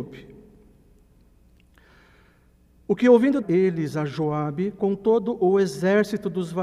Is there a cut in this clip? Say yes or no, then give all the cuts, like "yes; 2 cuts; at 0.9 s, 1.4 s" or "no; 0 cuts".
yes; 1 cut; at 3.4 s